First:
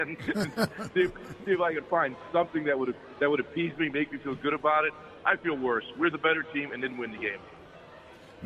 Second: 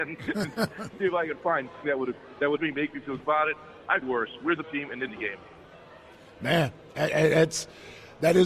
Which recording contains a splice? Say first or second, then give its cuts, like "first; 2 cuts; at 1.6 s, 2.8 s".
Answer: second; 7 cuts; at 0.9 s, 1.8 s, 2.6 s, 3.2 s, 4.0 s, 4.6 s, 5.1 s